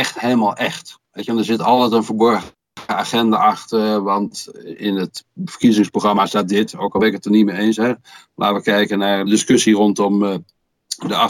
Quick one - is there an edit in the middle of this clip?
yes; 2 cuts; at 1.1 s, 9.3 s

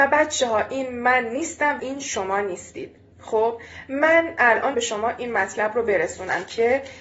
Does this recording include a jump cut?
yes; 3 cuts; at 1.8 s, 3.1 s, 4.7 s

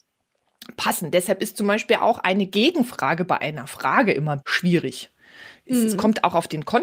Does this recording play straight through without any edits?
no; 1 cut; at 4.4 s

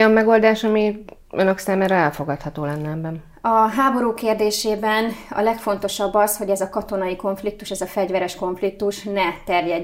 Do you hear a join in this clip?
no; 0 cuts

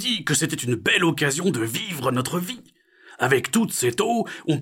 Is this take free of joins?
yes; 0 cuts

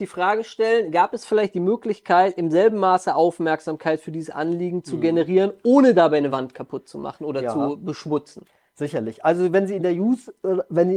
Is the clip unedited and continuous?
yes; 0 cuts

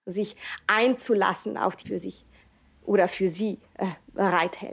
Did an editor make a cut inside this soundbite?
yes; 1 cut; at 1.8 s

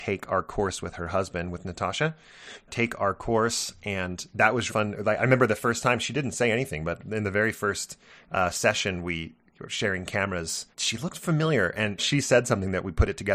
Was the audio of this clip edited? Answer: yes; 4 cuts; at 2.7 s, 4.7 s, 10.7 s, 12.0 s

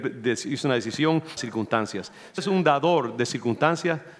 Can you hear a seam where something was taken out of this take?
yes; 2 cuts; at 1.4 s, 2.4 s

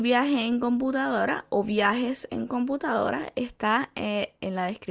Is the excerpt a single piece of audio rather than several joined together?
yes; 0 cuts

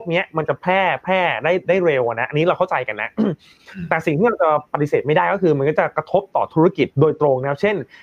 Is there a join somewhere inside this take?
yes; 1 cut; at 6.9 s

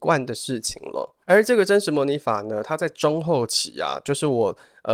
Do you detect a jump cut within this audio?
yes; 1 cut; at 1.2 s

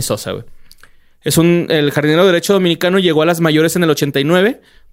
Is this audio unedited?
yes; 0 cuts

